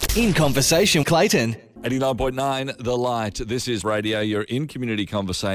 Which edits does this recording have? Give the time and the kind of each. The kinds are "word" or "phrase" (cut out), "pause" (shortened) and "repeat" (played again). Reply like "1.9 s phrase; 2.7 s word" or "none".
1.0 s word; 3.8 s word